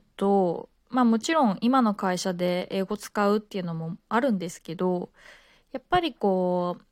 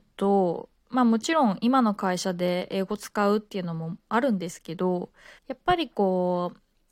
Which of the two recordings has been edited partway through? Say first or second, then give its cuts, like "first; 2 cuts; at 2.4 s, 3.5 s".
second; 1 cut; at 5.4 s